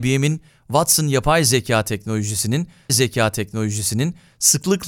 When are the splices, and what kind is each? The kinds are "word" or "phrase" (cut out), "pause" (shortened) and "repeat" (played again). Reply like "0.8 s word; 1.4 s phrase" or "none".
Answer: 2.9 s repeat

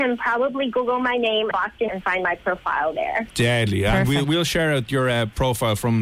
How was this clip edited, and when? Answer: 1.5 s word; 1.9 s word; 4.2 s word

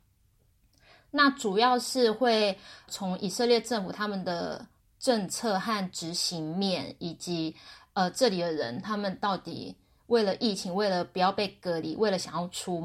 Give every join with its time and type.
2.9 s word; 4.8 s pause

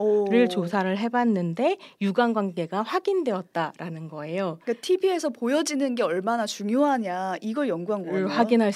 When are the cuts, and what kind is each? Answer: none

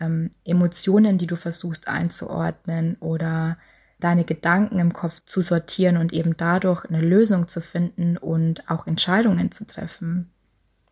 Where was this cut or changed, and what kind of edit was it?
4.0 s word; 5.2 s word

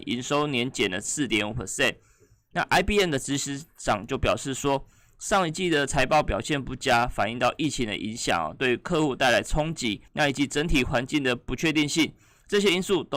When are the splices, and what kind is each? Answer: 10.1 s pause

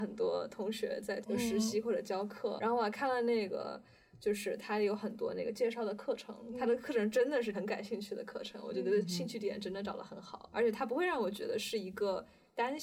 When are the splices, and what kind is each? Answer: 1.2 s word; 2.6 s word; 7.5 s word; 10.5 s word

